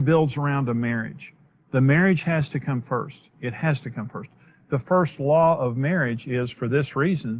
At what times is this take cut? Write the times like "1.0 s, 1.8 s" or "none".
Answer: none